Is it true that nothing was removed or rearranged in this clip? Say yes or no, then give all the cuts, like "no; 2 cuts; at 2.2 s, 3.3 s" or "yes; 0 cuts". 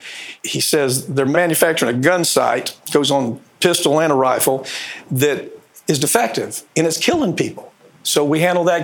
no; 1 cut; at 2.8 s